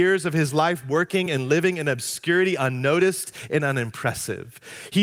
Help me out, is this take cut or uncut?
uncut